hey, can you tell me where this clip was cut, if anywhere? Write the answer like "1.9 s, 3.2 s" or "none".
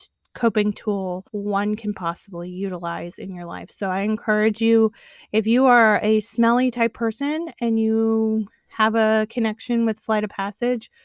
1.3 s